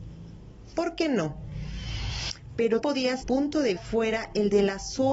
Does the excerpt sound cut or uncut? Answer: cut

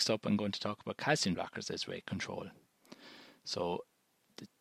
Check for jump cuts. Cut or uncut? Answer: cut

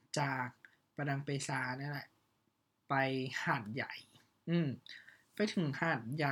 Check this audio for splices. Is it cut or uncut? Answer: uncut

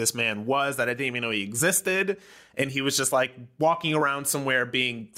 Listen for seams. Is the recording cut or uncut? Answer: uncut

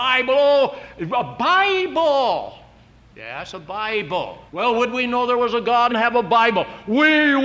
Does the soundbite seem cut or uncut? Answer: cut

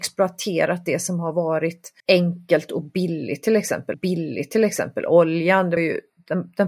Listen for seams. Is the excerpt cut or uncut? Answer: cut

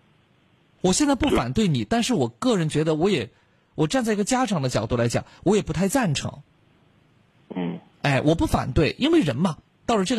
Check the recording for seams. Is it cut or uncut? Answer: uncut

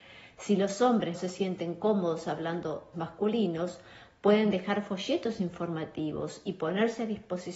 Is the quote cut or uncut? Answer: cut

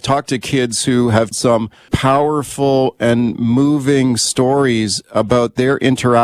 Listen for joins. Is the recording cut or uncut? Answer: cut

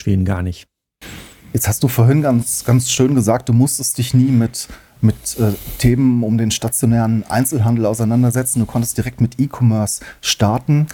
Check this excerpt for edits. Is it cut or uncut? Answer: uncut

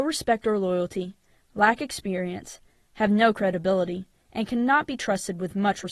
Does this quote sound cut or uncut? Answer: uncut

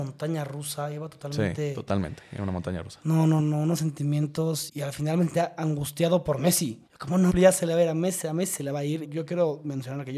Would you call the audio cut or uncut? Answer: cut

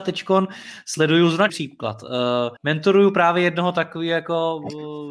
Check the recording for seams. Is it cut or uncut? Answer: cut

